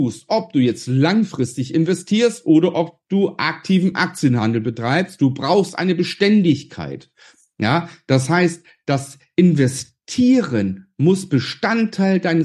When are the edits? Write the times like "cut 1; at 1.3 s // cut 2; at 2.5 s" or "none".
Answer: none

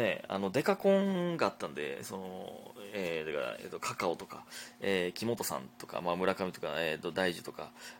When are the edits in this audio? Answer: none

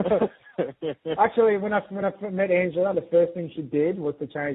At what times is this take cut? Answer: none

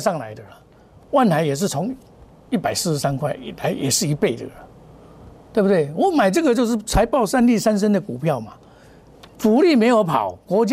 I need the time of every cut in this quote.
none

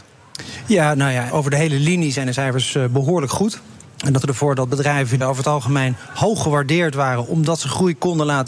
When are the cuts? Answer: cut 1; at 1.3 s // cut 2; at 3.8 s // cut 3; at 4.2 s // cut 4; at 5.2 s

